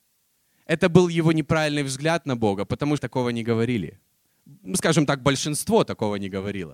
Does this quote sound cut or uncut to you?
cut